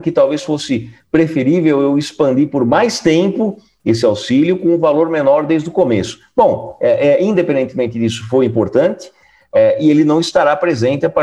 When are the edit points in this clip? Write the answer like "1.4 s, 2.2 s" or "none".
none